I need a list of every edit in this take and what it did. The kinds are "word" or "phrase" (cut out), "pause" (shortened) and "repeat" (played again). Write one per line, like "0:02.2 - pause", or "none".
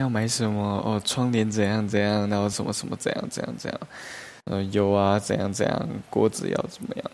0:04.4 - pause